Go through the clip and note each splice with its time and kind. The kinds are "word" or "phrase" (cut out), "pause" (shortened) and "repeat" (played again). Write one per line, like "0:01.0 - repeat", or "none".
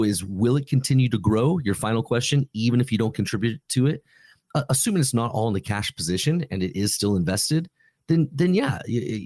none